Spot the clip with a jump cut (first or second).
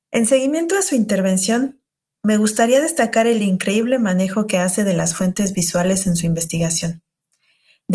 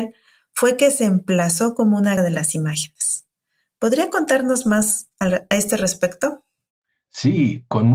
second